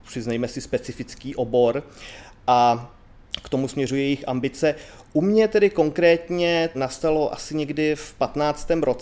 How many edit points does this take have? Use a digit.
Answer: 1